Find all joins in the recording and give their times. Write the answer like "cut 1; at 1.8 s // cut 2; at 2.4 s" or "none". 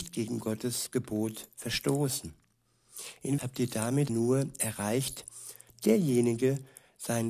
cut 1; at 3.4 s // cut 2; at 4.1 s // cut 3; at 5.7 s